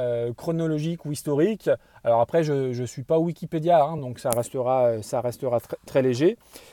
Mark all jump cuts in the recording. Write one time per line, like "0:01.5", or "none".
none